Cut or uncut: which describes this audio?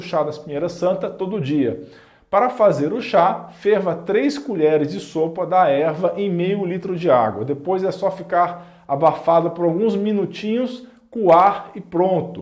uncut